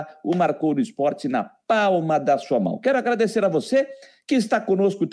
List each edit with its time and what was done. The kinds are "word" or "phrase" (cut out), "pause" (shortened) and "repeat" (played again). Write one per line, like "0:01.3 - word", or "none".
none